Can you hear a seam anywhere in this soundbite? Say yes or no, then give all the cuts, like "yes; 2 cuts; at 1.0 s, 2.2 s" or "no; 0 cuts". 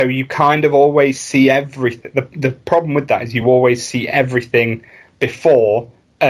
no; 0 cuts